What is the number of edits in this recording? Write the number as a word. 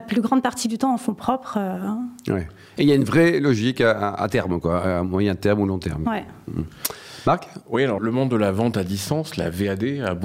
one